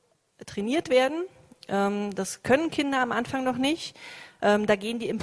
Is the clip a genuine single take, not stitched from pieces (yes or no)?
yes